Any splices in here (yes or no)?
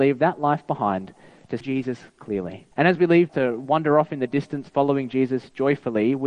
yes